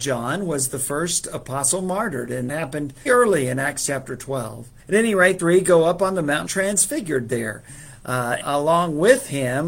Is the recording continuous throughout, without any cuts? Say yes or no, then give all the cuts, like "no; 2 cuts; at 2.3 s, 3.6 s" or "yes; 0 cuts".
no; 6 cuts; at 2.5 s, 3.1 s, 4.8 s, 5.4 s, 6.5 s, 8.4 s